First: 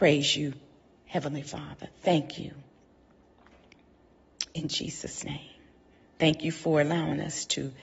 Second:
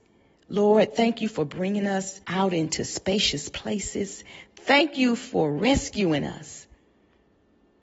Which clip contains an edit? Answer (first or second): second